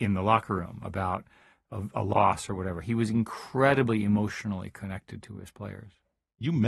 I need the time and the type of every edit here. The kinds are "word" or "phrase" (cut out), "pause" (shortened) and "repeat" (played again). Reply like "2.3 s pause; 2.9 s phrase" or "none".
none